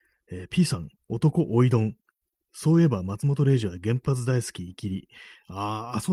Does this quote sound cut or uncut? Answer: uncut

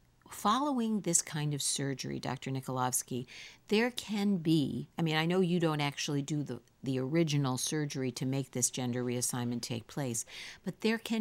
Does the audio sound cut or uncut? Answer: cut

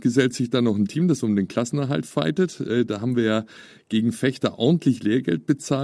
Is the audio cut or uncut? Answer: uncut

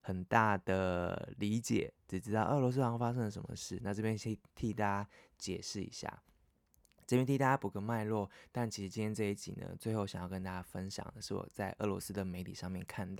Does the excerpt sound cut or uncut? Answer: uncut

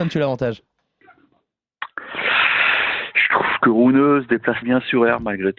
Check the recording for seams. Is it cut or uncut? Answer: cut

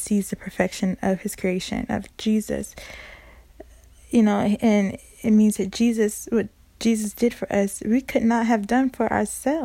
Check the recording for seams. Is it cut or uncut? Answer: uncut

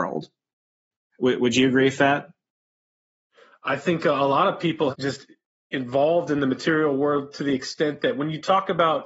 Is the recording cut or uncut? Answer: cut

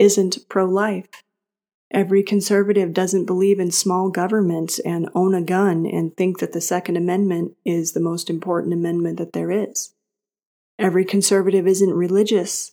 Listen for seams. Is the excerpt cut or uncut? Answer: uncut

